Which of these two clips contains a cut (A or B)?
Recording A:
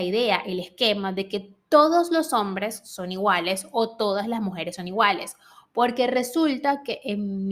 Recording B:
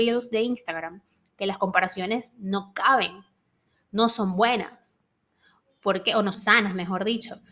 B